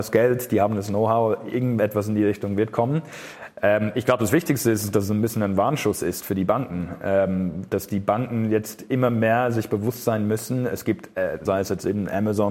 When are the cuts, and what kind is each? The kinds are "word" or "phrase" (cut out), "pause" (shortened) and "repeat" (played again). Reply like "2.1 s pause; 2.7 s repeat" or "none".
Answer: 11.5 s phrase